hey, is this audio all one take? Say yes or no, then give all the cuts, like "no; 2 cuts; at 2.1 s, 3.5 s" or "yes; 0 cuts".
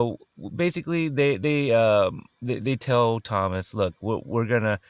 no; 1 cut; at 2.3 s